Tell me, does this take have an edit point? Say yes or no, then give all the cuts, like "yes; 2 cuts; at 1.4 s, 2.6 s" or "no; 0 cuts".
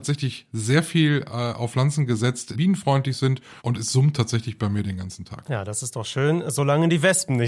yes; 2 cuts; at 2.5 s, 3.6 s